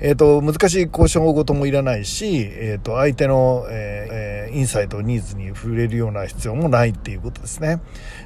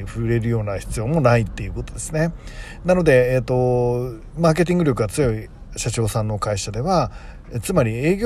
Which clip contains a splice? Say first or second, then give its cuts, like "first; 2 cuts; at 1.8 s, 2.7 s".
first; 1 cut; at 4.1 s